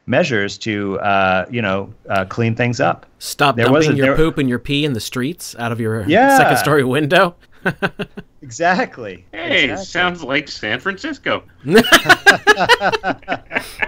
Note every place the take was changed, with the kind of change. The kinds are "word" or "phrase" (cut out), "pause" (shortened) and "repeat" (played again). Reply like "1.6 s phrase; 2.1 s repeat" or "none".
7.4 s pause